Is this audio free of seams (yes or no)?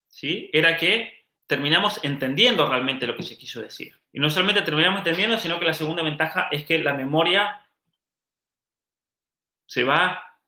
no